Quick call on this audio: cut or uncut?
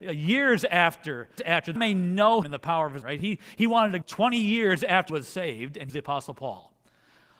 cut